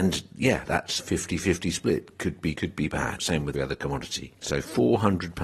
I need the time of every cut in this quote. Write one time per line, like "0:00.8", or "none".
0:01.0
0:02.5
0:03.5